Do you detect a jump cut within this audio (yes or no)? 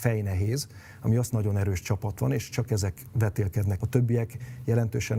yes